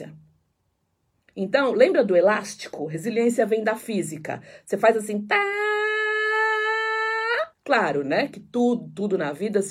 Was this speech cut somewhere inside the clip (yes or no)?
yes